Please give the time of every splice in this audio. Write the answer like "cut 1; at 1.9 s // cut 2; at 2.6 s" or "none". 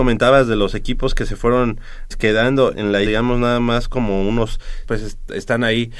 cut 1; at 2.1 s // cut 2; at 2.7 s // cut 3; at 3.1 s // cut 4; at 4.8 s